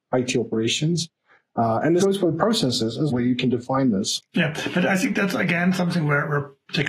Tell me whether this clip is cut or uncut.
cut